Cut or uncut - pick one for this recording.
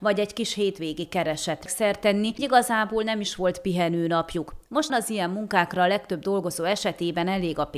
cut